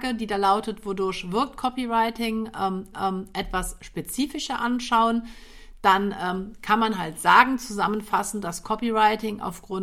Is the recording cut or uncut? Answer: cut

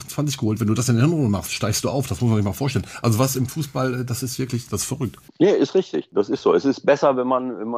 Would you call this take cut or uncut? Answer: uncut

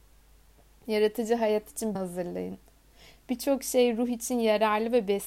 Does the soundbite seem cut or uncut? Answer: cut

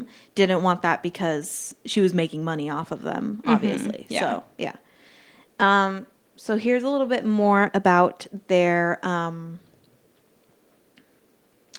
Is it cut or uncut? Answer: uncut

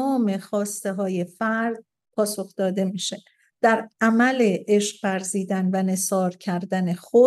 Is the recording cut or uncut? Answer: uncut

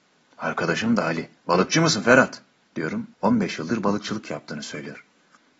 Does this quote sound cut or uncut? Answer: cut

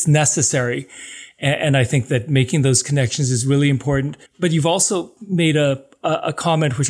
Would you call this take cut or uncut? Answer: cut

